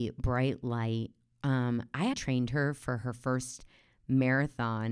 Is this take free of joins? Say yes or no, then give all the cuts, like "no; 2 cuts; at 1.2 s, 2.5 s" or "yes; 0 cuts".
no; 1 cut; at 2.1 s